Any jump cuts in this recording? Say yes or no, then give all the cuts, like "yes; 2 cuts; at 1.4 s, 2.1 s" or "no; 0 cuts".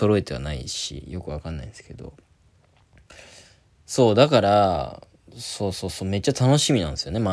no; 0 cuts